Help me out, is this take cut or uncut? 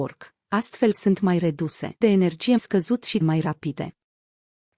cut